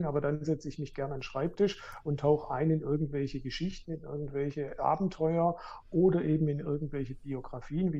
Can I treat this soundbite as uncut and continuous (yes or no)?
yes